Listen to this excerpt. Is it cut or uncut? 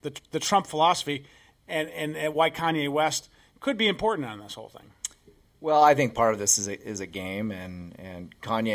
uncut